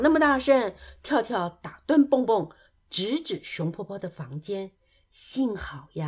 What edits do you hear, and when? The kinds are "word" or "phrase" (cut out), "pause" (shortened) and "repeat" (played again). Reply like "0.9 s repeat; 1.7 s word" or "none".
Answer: none